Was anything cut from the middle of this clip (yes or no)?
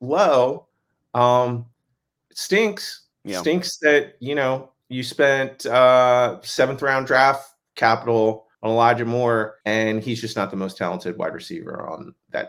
yes